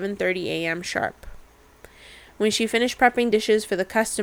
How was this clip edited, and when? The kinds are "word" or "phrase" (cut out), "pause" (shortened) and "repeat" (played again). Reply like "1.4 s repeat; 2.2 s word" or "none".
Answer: none